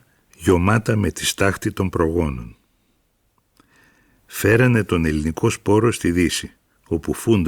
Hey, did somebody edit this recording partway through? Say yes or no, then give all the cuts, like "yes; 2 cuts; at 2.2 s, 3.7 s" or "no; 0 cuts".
no; 0 cuts